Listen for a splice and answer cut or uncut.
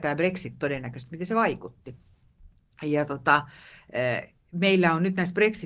uncut